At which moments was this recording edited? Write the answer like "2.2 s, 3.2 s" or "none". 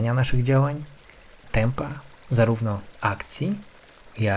1.4 s

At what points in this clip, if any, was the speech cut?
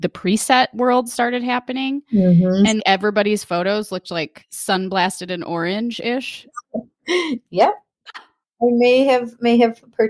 2.8 s, 8.1 s

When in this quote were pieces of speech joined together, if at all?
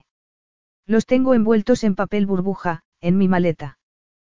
2.9 s

